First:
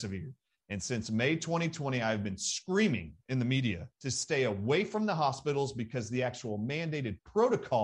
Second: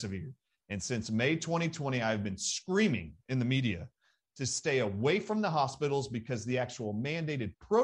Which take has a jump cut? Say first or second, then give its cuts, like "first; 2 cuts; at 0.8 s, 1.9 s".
first; 1 cut; at 3.9 s